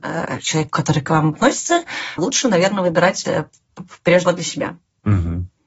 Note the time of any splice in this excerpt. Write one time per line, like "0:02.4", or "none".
0:01.3
0:02.2
0:03.2
0:04.2